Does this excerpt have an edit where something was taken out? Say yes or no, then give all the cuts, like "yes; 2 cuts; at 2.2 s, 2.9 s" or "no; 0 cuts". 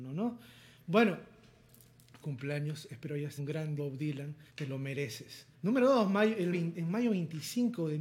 yes; 6 cuts; at 2.2 s, 3.4 s, 3.8 s, 4.5 s, 5.5 s, 6.5 s